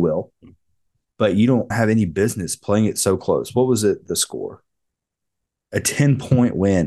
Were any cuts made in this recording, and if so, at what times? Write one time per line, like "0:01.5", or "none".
0:01.7